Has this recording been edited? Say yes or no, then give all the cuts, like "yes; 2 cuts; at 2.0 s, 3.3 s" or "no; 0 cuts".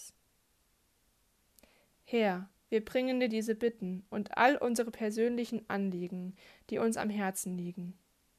no; 0 cuts